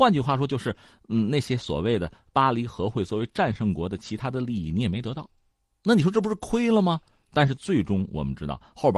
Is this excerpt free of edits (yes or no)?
yes